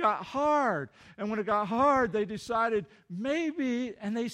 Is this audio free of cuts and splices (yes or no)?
yes